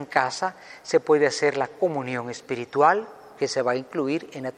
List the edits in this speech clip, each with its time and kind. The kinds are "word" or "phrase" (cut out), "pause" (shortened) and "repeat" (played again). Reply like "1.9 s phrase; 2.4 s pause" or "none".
none